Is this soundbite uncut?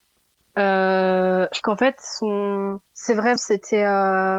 no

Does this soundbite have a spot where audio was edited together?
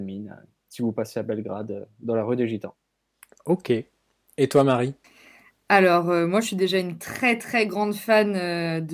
no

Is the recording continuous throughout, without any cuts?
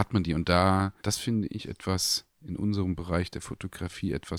no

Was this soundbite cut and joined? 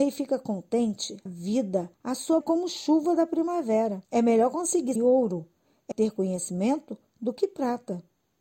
yes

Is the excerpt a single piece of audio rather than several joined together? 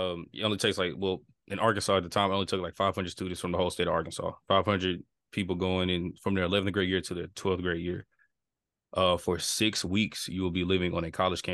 yes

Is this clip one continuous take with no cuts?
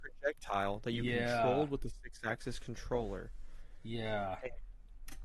yes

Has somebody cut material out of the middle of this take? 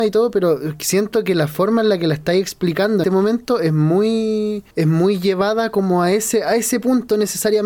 yes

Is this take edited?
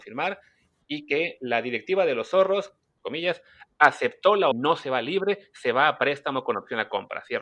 yes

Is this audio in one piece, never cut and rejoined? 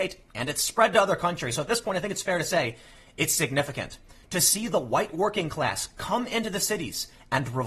yes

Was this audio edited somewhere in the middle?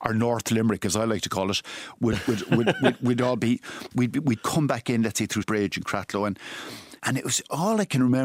yes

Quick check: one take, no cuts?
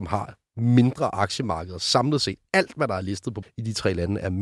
no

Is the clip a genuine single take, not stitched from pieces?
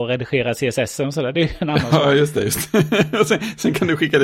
yes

